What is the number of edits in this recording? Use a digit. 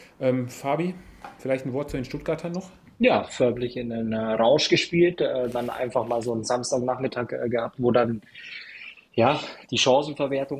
2